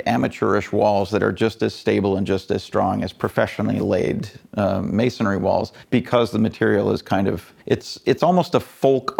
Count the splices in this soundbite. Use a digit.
2